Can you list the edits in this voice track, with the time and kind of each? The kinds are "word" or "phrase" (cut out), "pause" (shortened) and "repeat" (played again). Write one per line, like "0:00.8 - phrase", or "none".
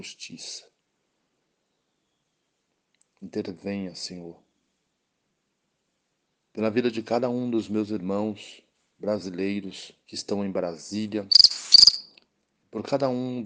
0:10.0 - pause